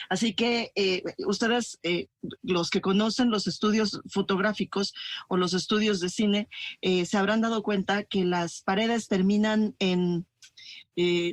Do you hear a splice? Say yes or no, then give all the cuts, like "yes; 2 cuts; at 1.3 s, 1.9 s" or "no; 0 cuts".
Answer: no; 0 cuts